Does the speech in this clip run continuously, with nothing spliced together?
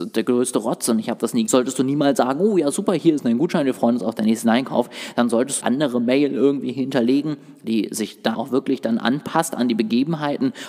no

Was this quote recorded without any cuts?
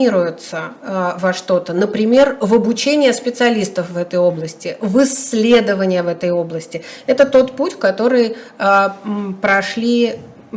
yes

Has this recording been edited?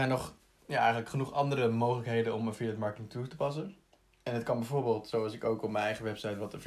no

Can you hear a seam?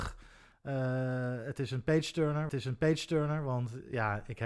yes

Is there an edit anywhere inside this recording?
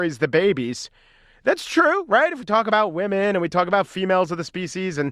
no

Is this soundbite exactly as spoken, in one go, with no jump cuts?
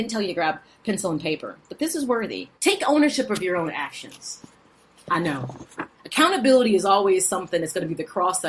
no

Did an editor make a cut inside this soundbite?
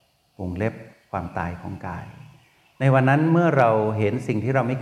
no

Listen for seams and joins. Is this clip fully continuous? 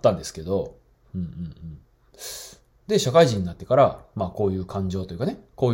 yes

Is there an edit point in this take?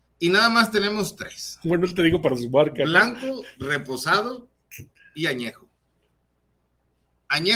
no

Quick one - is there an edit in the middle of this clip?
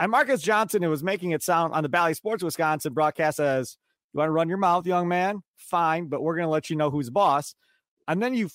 no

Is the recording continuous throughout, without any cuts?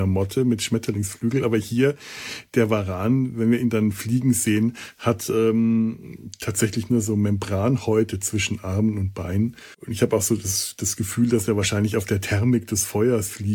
no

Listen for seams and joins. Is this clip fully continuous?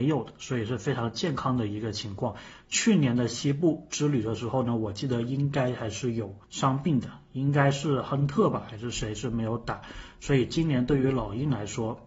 no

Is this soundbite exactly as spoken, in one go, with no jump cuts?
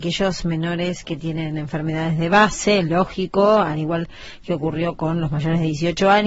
yes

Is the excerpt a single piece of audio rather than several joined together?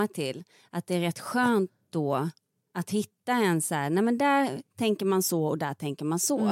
yes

